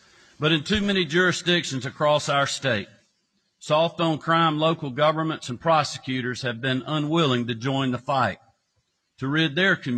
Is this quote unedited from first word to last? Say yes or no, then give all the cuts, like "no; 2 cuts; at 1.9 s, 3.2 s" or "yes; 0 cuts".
yes; 0 cuts